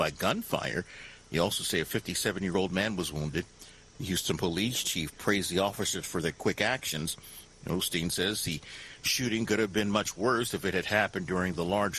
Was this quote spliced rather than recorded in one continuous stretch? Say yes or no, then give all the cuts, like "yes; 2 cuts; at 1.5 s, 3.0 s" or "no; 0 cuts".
no; 0 cuts